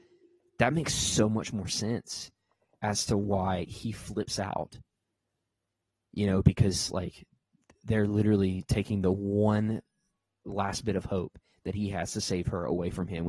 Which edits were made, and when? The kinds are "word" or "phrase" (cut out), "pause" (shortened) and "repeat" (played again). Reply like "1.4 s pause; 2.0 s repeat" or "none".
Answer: none